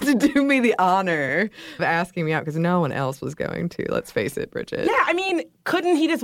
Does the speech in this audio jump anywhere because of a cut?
yes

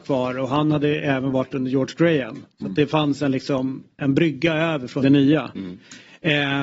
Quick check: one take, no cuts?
no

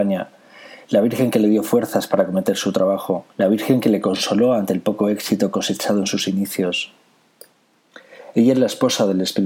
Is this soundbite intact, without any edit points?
no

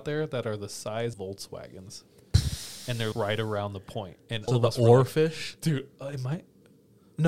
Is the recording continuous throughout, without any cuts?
no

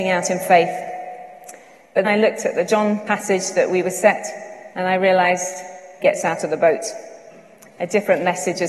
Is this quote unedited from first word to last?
no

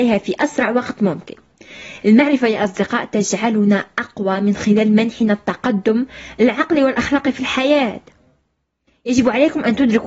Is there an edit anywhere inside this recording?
no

